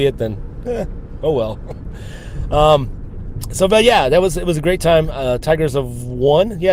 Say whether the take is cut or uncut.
uncut